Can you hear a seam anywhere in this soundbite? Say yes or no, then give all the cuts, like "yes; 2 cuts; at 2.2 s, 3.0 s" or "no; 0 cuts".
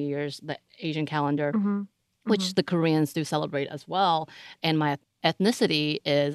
no; 0 cuts